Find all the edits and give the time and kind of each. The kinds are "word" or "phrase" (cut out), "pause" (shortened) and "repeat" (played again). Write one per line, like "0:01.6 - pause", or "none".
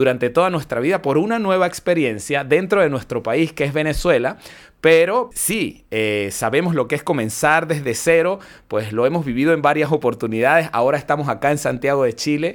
0:05.3 - word

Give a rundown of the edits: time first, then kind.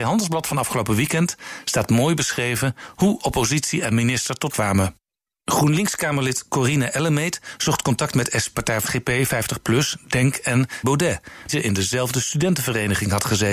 0:04.5 - word
0:08.5 - word
0:08.9 - phrase
0:10.8 - word
0:11.5 - phrase

